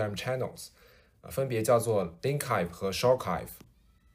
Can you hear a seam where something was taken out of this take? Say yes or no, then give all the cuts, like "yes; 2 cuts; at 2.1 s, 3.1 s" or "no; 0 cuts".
no; 0 cuts